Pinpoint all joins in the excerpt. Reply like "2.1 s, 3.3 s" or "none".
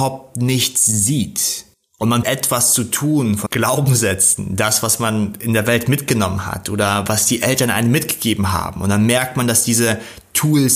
1.7 s, 2.2 s, 3.5 s